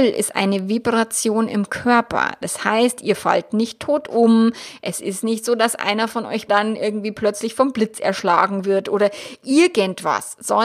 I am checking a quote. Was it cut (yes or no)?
yes